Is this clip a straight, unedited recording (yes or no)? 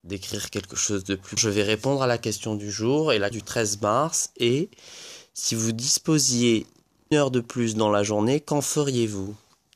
no